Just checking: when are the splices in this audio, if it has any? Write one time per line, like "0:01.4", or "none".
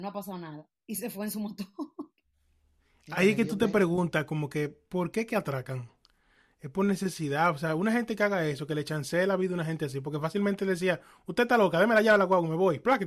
none